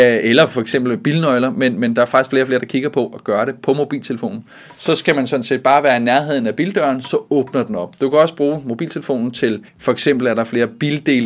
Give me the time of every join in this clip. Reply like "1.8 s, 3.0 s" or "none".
9.7 s